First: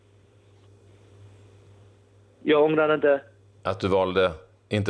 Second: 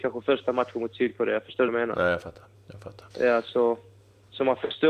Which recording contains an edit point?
second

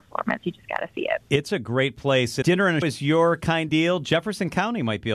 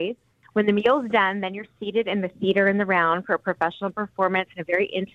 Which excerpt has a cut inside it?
first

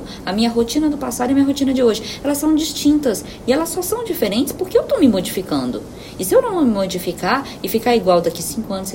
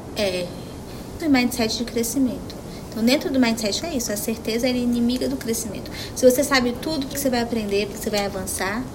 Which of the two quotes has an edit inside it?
second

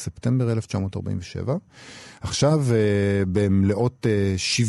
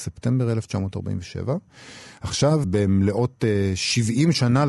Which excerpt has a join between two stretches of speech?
second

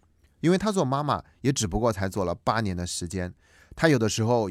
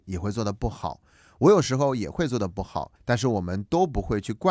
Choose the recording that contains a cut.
second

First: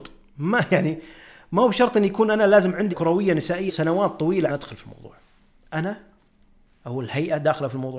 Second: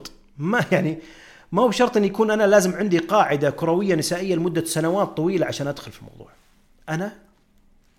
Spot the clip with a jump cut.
first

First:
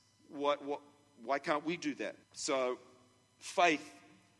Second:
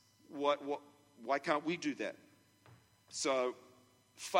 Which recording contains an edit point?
first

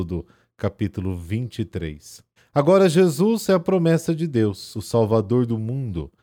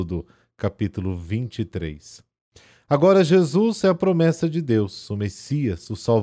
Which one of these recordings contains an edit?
first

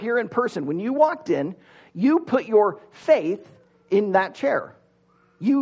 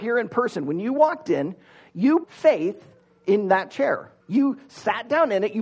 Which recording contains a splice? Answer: second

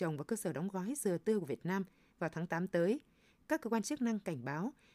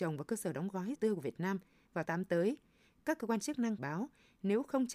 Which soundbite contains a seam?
second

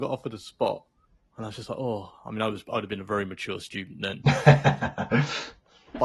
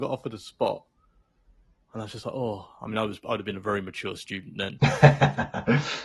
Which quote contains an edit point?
first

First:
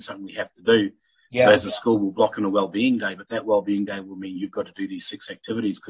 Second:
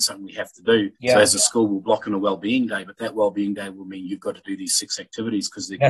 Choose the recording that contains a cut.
second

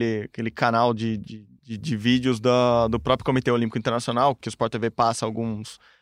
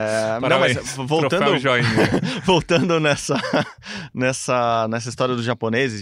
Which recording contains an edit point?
first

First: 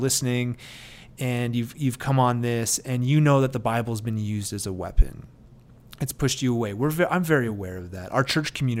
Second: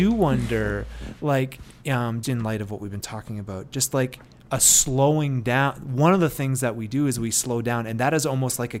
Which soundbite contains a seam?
second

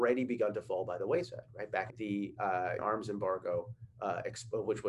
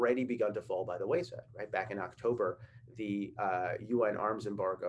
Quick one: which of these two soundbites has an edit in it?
first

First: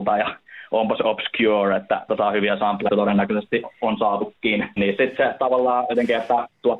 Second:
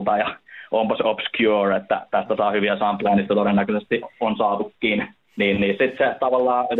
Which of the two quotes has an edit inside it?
first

